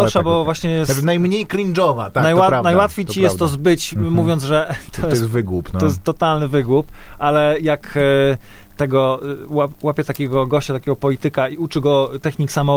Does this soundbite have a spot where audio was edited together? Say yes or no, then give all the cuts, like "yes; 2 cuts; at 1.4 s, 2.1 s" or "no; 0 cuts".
no; 0 cuts